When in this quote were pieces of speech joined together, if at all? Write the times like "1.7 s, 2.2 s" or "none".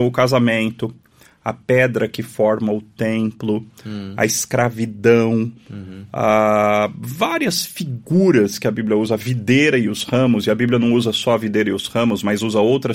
none